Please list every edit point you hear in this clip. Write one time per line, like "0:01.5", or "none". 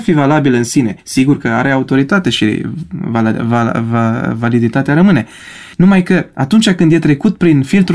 0:01.0
0:05.7